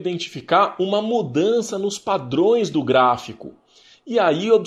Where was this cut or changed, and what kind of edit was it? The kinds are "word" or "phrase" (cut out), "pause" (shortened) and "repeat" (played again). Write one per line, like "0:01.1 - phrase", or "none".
none